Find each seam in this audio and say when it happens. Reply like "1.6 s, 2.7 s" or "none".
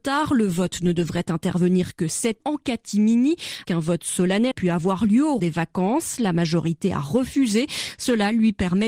2.4 s, 3.6 s, 4.5 s, 5.4 s